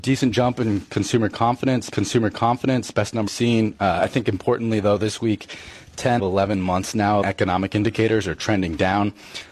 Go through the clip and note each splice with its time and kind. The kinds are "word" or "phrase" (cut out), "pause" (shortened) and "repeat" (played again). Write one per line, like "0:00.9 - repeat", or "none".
0:01.9 - repeat
0:03.3 - word
0:06.2 - word
0:07.2 - phrase